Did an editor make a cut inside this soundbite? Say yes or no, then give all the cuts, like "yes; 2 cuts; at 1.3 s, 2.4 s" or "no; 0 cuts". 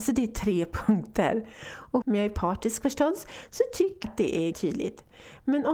yes; 3 cuts; at 2.0 s, 4.0 s, 4.5 s